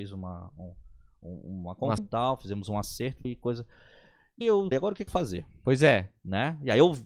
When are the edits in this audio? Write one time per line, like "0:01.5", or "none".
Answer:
0:02.0
0:03.2
0:04.4
0:04.7
0:05.1